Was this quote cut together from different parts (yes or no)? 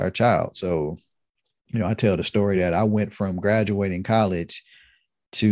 no